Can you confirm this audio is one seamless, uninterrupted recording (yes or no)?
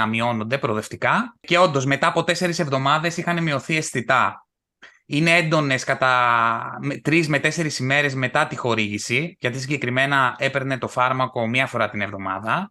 yes